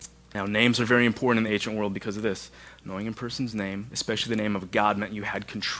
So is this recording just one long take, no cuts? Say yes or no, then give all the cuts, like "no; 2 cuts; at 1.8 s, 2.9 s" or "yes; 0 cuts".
yes; 0 cuts